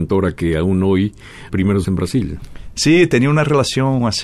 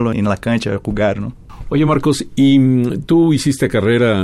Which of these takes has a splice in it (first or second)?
first